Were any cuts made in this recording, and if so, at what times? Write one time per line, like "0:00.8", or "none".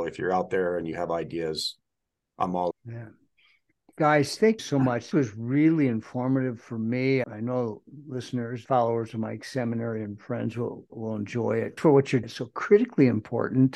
0:02.7
0:04.6
0:05.1
0:07.2
0:08.6
0:10.9
0:11.8
0:12.2